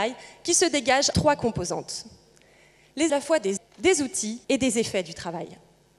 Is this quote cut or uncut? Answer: cut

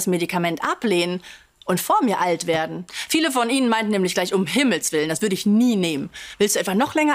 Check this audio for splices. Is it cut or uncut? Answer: uncut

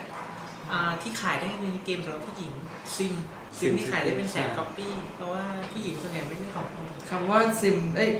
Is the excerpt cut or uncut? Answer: cut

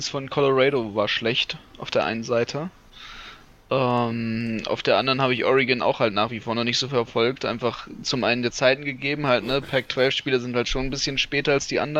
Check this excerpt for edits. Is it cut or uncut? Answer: uncut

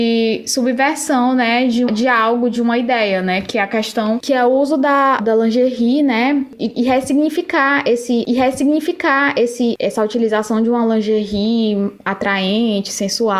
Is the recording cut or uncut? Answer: cut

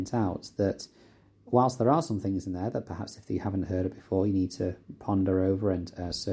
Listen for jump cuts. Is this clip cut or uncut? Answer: uncut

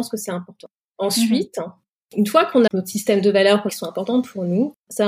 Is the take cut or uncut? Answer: cut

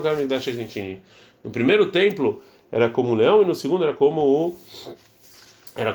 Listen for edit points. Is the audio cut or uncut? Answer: uncut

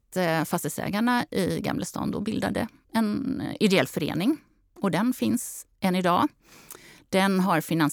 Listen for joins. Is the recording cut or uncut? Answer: uncut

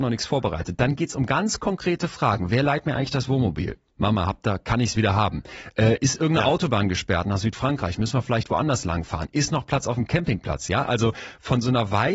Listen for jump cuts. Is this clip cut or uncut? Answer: uncut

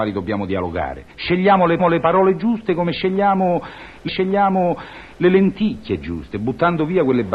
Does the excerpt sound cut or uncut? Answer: cut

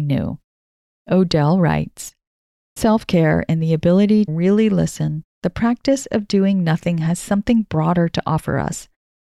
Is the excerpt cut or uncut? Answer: cut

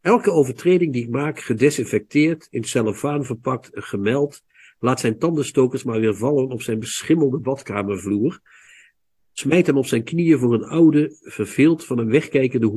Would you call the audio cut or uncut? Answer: uncut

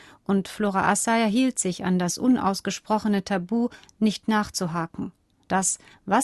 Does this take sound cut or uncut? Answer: uncut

